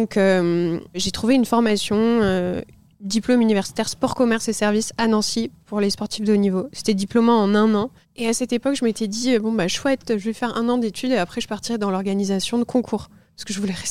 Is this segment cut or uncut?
uncut